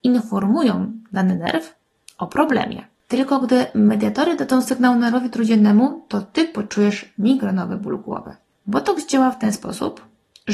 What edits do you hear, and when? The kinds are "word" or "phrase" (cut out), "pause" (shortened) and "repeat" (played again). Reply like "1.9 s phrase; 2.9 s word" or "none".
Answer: none